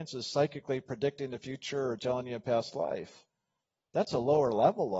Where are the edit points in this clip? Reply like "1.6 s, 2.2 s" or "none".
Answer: none